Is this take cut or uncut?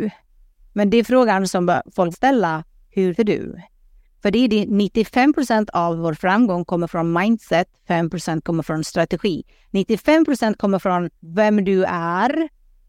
cut